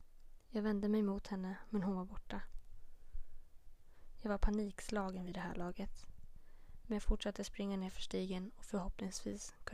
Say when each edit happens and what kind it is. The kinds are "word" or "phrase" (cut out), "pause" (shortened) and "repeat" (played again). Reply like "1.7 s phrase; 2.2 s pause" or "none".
none